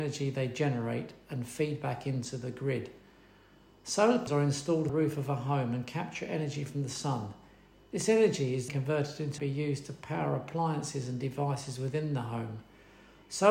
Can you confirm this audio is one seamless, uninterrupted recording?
no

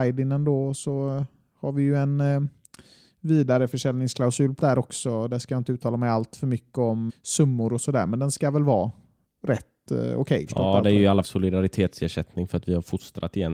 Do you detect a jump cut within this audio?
yes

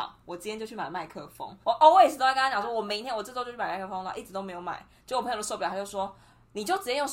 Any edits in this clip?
yes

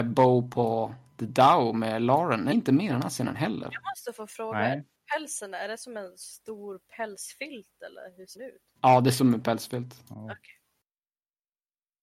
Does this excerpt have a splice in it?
yes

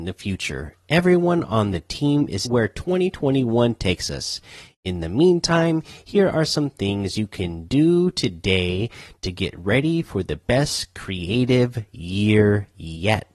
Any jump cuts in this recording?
yes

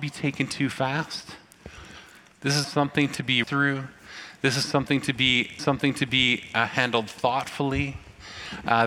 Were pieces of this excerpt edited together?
yes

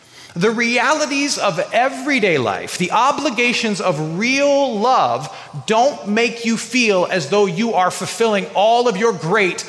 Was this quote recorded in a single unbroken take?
yes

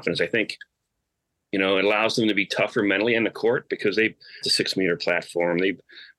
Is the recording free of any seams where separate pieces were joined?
no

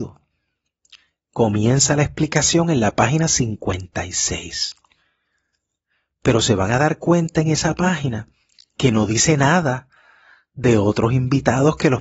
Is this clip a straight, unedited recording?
yes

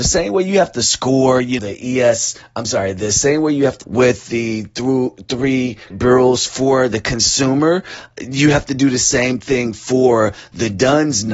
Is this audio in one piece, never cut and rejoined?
no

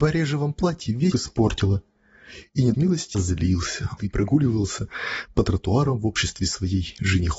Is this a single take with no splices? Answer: no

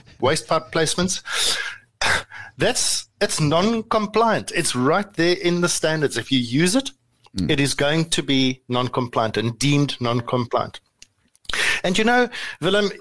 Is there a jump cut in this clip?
no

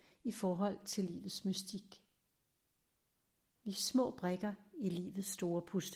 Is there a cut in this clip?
no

